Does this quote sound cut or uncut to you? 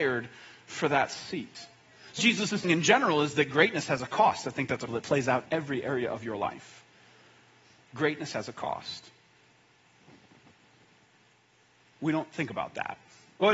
cut